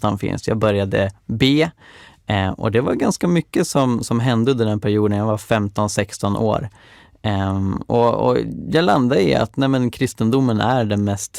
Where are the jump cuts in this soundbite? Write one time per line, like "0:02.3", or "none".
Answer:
none